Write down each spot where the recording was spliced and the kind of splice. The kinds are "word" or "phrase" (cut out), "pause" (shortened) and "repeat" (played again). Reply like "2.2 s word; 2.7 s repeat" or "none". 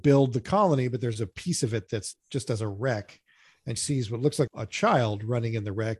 2.1 s word; 3.8 s word; 4.5 s word